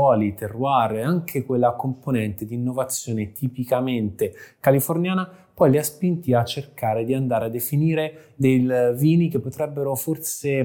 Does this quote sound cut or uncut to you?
uncut